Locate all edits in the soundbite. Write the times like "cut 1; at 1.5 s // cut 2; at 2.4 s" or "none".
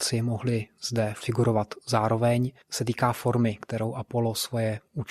cut 1; at 2.6 s